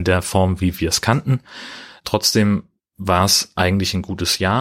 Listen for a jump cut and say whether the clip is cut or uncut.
uncut